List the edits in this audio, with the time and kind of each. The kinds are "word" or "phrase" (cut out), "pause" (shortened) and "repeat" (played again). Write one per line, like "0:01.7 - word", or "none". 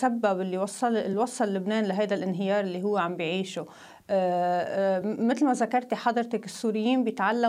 none